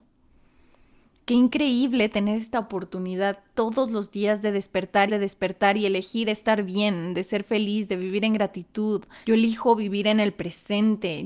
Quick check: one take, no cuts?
no; 2 cuts; at 5.1 s, 9.2 s

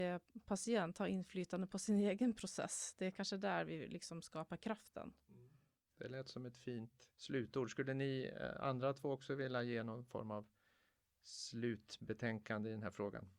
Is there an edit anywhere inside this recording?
yes; 1 cut; at 7.1 s

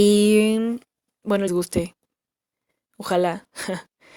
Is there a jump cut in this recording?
yes; 1 cut; at 1.5 s

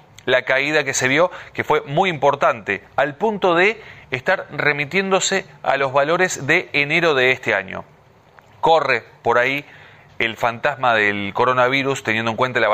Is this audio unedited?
yes; 0 cuts

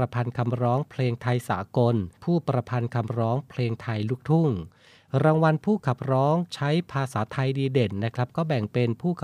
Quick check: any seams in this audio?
yes; 1 cut; at 2.1 s

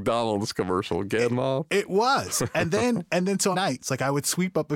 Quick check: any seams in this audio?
yes; 2 cuts; at 1.3 s, 3.5 s

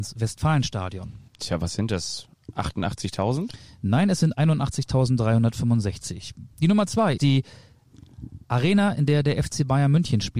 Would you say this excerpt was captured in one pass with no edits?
no; 3 cuts; at 1.3 s, 7.2 s, 8.4 s

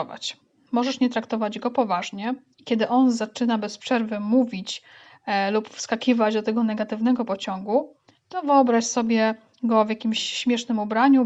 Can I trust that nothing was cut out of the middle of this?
yes; 0 cuts

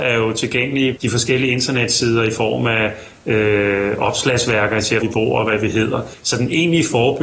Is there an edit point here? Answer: yes; 2 cuts; at 1.0 s, 5.0 s

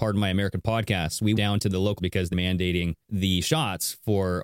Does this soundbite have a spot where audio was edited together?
yes; 4 cuts; at 1.4 s, 2.0 s, 2.3 s, 3.0 s

